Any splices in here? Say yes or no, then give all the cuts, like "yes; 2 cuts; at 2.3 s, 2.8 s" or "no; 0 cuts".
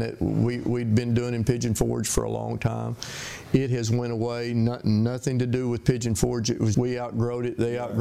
yes; 1 cut; at 6.7 s